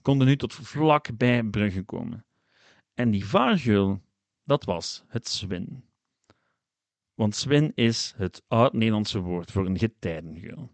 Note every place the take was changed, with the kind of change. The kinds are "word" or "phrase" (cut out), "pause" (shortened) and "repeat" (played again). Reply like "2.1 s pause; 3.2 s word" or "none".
none

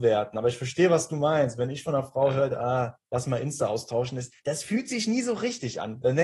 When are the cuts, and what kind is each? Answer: 4.4 s pause

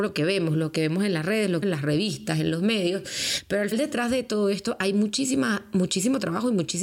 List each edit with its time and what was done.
1.6 s phrase; 3.7 s word

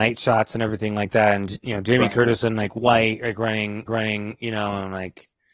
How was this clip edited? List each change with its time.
3.9 s repeat

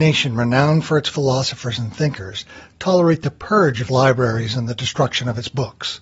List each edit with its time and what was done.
3.9 s word

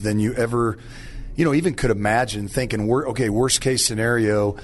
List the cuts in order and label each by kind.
none

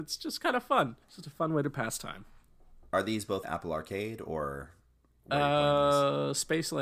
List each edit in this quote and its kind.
1.0 s pause; 3.4 s word

